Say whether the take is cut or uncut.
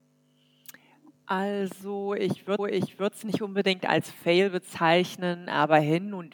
cut